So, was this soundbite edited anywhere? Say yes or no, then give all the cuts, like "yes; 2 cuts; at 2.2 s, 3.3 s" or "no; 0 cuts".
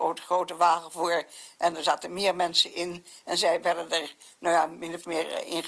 no; 0 cuts